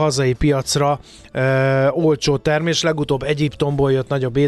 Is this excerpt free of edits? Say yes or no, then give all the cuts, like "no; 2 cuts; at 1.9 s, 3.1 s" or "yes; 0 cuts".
yes; 0 cuts